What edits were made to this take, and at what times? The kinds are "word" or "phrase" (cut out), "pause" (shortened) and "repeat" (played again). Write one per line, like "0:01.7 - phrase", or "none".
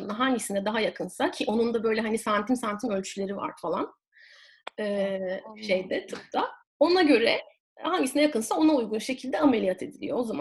0:06.7 - pause
0:07.6 - pause